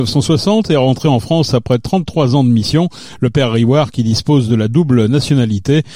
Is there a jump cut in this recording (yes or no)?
no